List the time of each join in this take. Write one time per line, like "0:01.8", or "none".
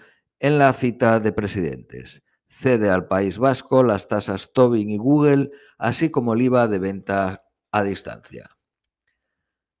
none